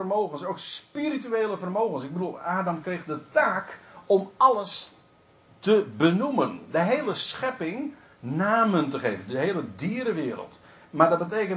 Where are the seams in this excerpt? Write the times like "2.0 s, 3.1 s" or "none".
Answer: none

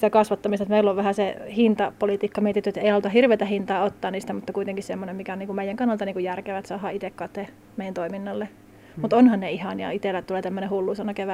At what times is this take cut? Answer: none

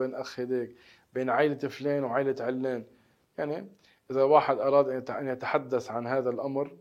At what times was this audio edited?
none

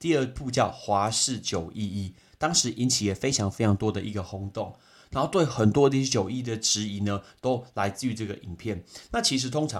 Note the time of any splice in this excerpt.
none

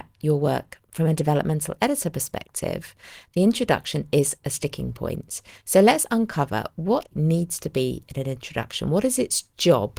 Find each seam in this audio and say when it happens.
7.1 s

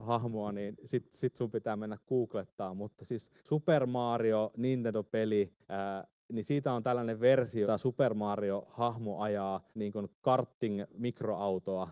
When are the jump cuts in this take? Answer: 3.4 s, 5.6 s, 7.6 s, 9.7 s

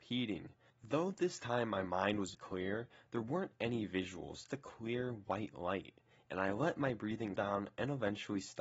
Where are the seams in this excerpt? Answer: 2.3 s, 4.5 s, 7.4 s

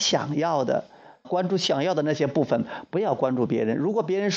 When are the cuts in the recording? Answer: 1.2 s

